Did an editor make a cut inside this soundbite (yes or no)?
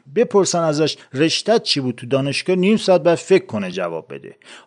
no